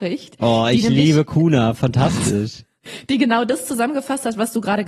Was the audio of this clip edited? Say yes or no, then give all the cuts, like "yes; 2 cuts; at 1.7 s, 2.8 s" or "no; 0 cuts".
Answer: no; 0 cuts